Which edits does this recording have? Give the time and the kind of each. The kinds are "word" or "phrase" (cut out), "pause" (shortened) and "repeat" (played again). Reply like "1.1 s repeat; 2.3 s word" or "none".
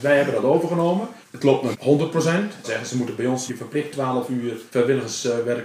1.2 s pause; 1.7 s word; 2.6 s phrase; 3.5 s word; 3.9 s word; 4.7 s pause

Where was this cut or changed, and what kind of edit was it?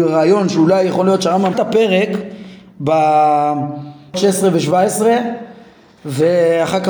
1.5 s word; 4.1 s word

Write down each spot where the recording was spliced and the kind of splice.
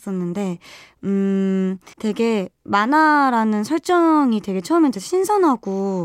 1.9 s pause; 4.9 s word

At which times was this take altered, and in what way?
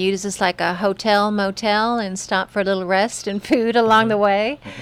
none

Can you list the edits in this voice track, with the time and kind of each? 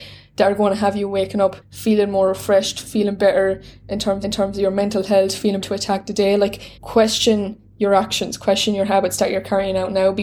1.6 s pause; 4.2 s repeat; 5.6 s word; 6.8 s pause

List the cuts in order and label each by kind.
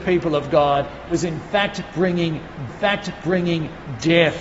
1.1 s word; 2.7 s repeat

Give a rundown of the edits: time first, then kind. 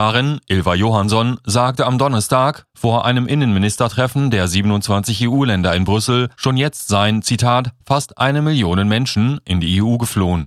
6.3 s pause

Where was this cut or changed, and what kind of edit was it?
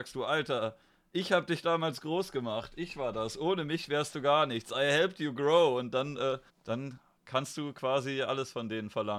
6.5 s pause

